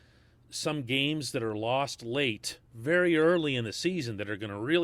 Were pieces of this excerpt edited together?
yes; 1 cut; at 2.7 s

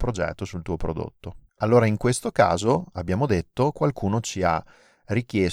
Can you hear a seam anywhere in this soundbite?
yes; 1 cut; at 1.5 s

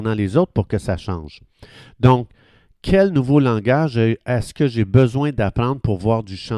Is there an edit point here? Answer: no; 0 cuts

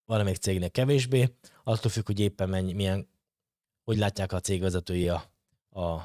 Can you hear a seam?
no; 0 cuts

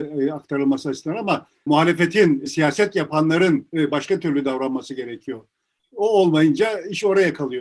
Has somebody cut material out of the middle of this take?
no; 0 cuts

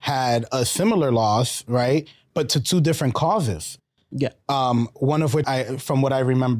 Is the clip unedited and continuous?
no; 1 cut; at 5.4 s

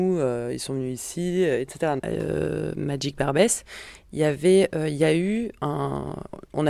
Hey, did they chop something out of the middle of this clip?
no; 0 cuts

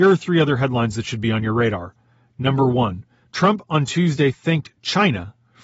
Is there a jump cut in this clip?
no; 0 cuts

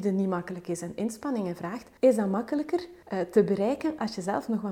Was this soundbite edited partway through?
yes; 2 cuts; at 2.0 s, 3.0 s

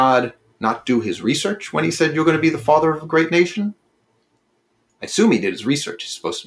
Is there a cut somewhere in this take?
no; 0 cuts

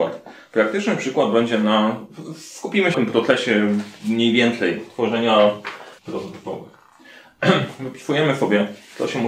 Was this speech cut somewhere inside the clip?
yes; 2 cuts; at 2.9 s, 6.0 s

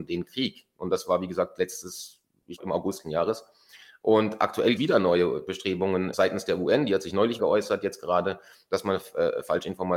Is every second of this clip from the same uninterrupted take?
no; 5 cuts; at 2.6 s, 3.0 s, 4.8 s, 6.1 s, 7.4 s

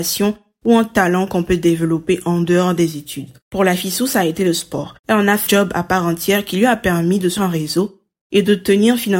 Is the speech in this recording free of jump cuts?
no; 4 cuts; at 3.4 s, 5.0 s, 5.5 s, 7.4 s

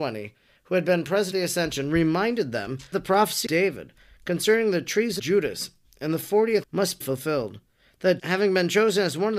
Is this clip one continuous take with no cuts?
no; 7 cuts; at 1.3 s, 2.9 s, 3.5 s, 5.2 s, 6.6 s, 7.0 s, 8.2 s

